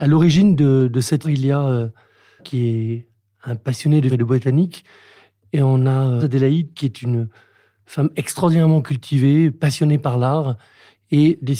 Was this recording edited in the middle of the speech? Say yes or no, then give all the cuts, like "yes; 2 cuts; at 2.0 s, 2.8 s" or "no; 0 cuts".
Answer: yes; 4 cuts; at 1.2 s, 2.4 s, 4.1 s, 6.2 s